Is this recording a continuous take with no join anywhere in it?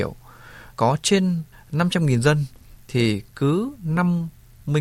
yes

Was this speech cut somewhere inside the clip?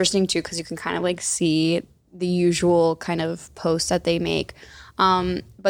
no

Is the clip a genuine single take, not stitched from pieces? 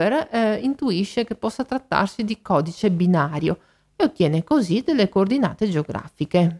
yes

